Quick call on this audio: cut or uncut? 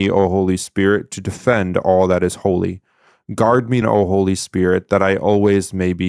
cut